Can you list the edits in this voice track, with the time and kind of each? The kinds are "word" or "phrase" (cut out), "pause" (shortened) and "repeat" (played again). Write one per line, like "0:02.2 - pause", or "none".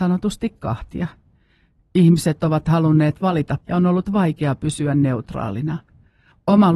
0:03.6 - word